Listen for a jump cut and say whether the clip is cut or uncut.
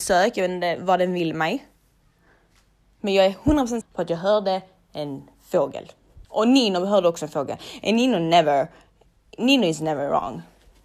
cut